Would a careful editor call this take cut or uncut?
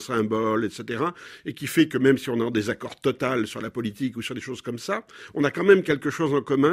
uncut